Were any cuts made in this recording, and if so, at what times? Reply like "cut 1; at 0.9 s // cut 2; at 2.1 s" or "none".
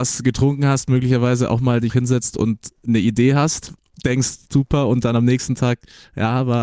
cut 1; at 1.9 s // cut 2; at 4.5 s